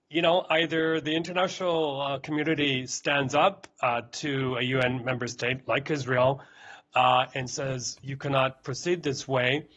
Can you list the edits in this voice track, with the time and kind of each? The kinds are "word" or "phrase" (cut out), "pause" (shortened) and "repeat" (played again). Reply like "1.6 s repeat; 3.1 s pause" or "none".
none